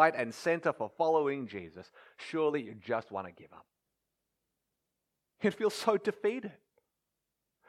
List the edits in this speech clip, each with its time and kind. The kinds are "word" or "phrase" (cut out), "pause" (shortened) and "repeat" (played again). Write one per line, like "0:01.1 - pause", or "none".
none